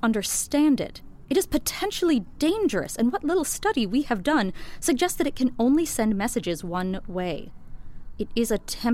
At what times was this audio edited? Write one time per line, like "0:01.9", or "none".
none